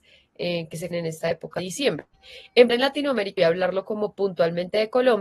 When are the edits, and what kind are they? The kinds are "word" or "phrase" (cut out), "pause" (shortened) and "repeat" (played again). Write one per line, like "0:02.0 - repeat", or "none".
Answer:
0:00.9 - word
0:01.6 - word
0:02.7 - word
0:03.4 - word